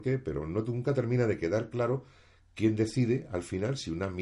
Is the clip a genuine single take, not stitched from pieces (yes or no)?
yes